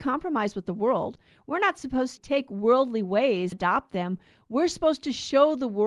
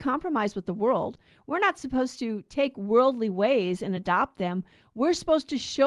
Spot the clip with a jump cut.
first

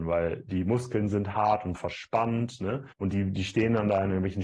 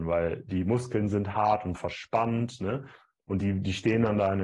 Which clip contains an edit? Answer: first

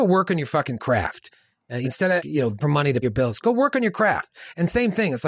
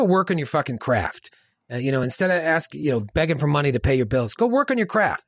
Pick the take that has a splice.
first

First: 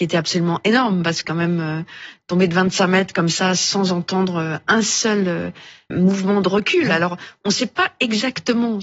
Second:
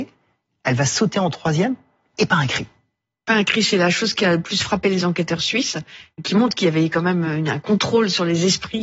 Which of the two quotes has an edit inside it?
first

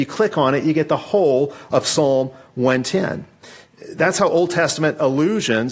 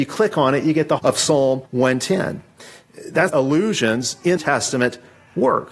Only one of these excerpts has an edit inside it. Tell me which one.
second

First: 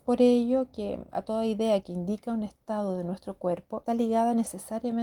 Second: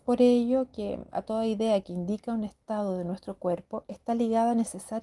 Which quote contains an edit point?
first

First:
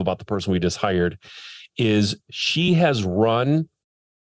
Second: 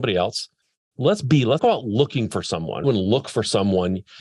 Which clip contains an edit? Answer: second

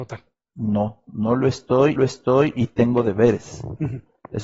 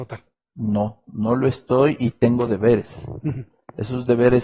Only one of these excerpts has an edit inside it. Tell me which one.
first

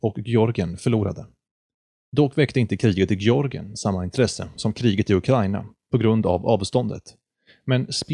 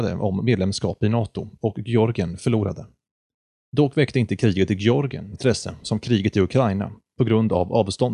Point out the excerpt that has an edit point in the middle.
second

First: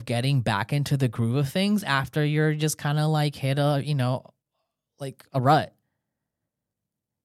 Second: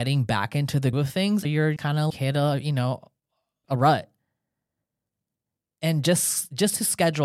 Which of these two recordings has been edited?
second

